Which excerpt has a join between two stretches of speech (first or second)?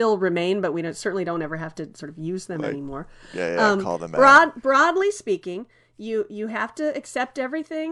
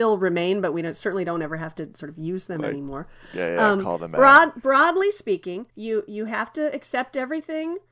second